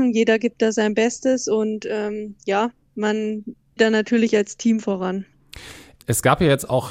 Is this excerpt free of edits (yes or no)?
no